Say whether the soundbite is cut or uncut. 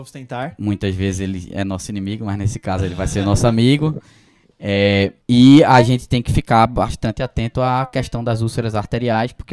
cut